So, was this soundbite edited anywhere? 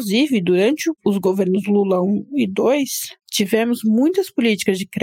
no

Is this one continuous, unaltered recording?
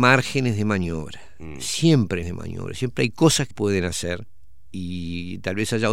no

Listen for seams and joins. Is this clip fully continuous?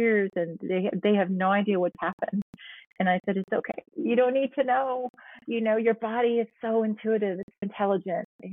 no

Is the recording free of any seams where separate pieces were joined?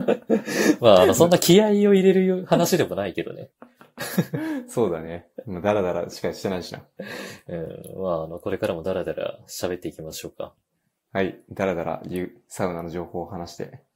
yes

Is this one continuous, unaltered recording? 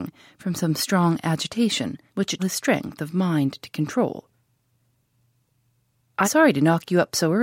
no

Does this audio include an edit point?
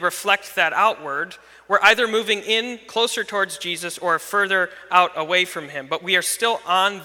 no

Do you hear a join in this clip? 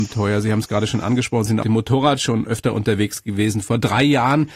yes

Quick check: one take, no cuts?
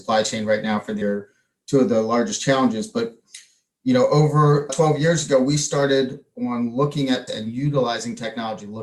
no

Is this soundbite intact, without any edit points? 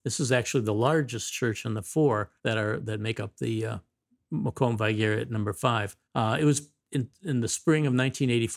no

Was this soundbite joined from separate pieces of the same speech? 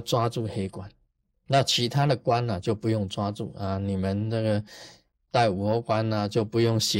no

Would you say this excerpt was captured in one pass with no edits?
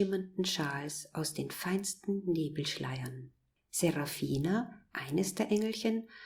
yes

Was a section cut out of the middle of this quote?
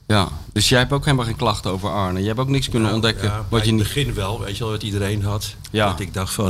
no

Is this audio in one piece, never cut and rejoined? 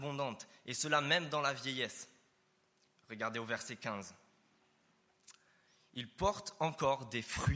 yes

